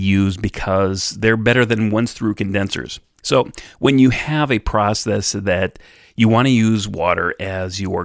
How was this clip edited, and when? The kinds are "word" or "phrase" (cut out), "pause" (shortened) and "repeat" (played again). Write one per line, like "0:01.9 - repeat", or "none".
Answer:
none